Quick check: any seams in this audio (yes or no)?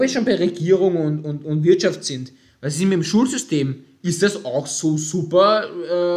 no